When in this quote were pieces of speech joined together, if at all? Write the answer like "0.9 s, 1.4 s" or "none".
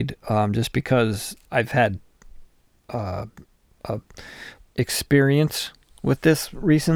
1.4 s, 4.7 s

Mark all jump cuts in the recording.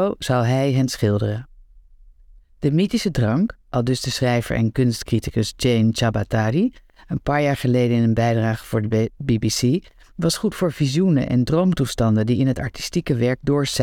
none

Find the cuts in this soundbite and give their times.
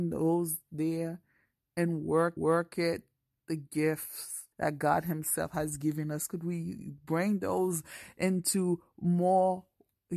2.4 s, 4.5 s

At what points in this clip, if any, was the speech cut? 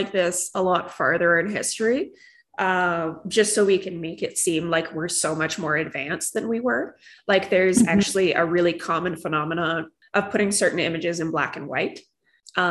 none

